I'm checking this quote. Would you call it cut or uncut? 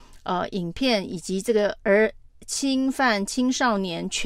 uncut